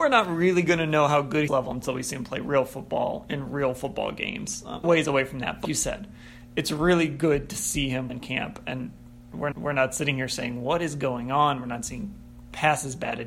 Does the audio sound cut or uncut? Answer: cut